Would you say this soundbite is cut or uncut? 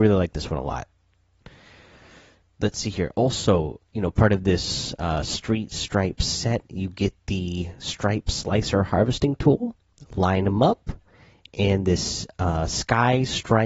uncut